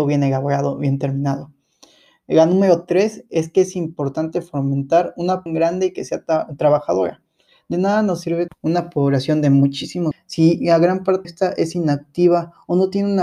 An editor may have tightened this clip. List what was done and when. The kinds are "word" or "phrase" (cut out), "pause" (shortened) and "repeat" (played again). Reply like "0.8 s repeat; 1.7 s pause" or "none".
5.5 s word; 8.5 s word; 10.1 s word; 11.2 s word